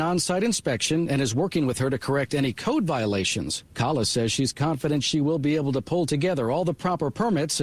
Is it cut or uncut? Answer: uncut